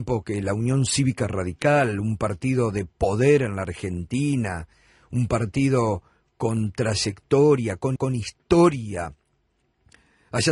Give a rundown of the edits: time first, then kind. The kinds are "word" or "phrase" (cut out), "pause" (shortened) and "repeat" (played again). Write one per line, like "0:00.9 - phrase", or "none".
0:08.0 - repeat